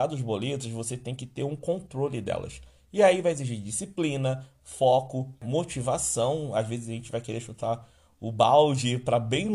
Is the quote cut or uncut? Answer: uncut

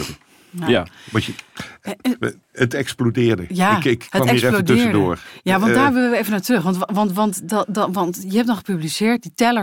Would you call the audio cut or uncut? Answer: uncut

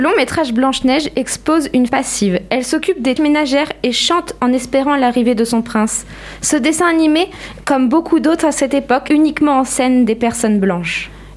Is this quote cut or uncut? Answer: cut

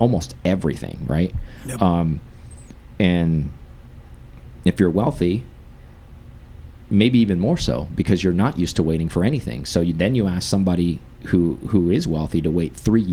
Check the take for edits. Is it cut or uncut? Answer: uncut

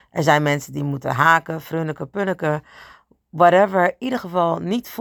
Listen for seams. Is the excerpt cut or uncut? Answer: uncut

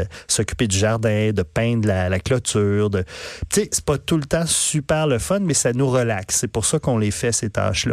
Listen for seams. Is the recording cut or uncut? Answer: uncut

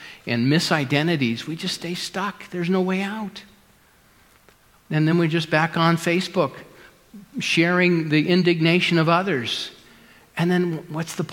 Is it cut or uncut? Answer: uncut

